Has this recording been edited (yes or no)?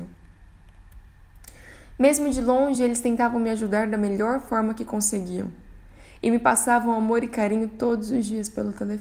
no